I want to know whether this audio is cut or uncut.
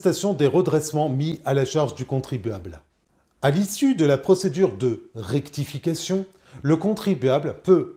uncut